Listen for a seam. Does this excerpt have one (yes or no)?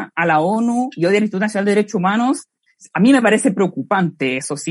no